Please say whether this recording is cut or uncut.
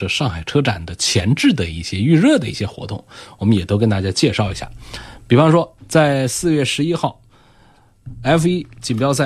cut